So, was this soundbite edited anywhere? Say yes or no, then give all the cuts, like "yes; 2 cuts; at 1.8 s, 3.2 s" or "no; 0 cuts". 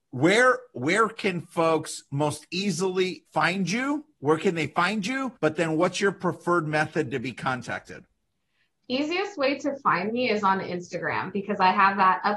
yes; 3 cuts; at 3.3 s, 4.1 s, 5.4 s